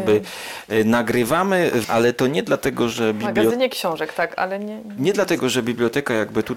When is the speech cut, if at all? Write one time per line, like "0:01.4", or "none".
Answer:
0:01.8